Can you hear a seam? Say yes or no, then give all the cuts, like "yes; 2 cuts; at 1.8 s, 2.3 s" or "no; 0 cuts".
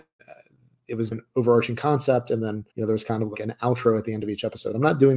yes; 3 cuts; at 1.1 s, 2.7 s, 3.3 s